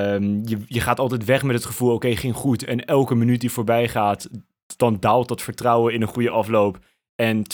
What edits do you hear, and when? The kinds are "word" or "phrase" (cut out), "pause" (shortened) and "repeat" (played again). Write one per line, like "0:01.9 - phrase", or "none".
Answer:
0:04.8 - word